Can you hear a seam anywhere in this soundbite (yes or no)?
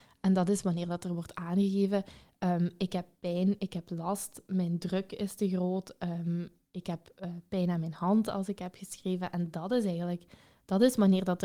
no